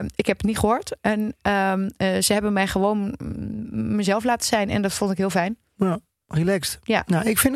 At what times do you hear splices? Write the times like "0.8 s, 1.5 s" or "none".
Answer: none